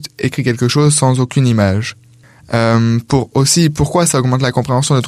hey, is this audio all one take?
yes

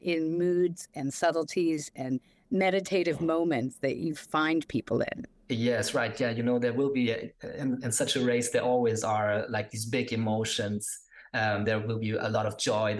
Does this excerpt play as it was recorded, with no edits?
yes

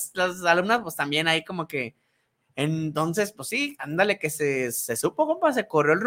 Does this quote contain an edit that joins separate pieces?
no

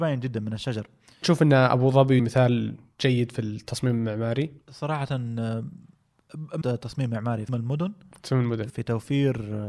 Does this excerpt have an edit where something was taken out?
yes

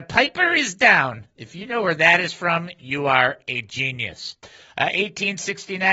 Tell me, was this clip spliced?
no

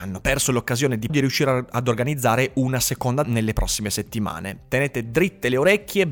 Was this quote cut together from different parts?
yes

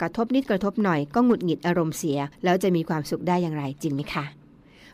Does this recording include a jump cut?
yes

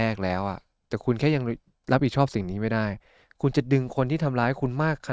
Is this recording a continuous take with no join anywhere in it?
yes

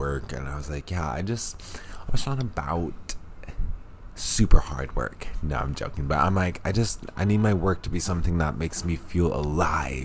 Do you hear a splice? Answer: no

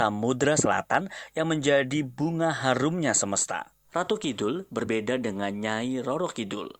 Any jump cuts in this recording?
yes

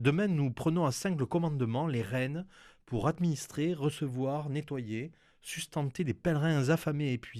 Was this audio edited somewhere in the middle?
no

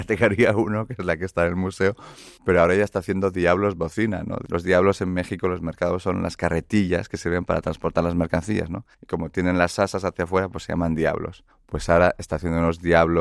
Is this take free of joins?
no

